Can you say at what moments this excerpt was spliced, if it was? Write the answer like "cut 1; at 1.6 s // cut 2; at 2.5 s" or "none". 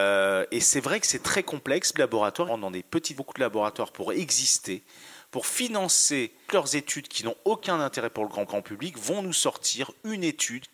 cut 1; at 1.9 s // cut 2; at 2.5 s // cut 3; at 3.1 s // cut 4; at 6.5 s // cut 5; at 8.5 s